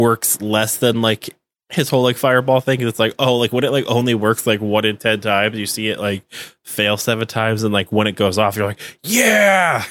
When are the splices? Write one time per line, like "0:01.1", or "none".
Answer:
none